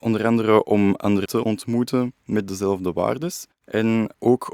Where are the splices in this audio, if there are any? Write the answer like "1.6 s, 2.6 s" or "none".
1.3 s, 3.5 s